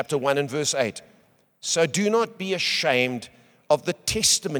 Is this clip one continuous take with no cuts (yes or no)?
yes